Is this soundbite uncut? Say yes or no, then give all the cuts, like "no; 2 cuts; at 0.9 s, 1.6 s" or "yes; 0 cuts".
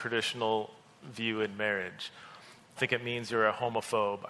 no; 1 cut; at 2.8 s